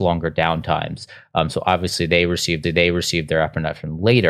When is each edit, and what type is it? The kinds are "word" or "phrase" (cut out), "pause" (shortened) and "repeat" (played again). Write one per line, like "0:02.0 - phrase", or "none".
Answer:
0:02.6 - repeat